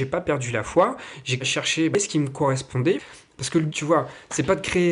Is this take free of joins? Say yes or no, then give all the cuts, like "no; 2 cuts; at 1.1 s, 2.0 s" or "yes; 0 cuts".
no; 2 cuts; at 1.4 s, 3.7 s